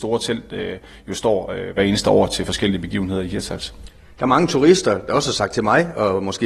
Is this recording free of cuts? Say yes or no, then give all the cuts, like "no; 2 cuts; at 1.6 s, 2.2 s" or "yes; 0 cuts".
yes; 0 cuts